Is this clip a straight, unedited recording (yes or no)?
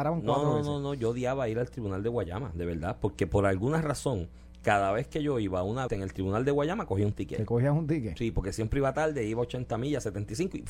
no